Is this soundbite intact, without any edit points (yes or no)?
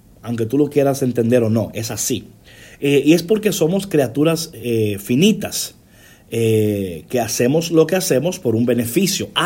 yes